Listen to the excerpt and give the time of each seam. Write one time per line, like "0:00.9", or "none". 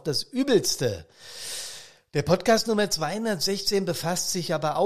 none